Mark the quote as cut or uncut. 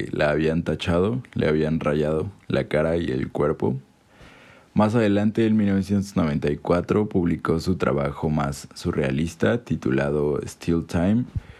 uncut